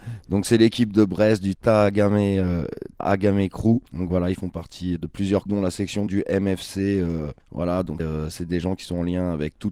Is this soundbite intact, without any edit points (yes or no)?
no